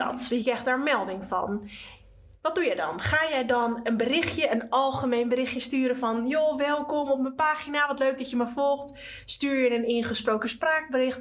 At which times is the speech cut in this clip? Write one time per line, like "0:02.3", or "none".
none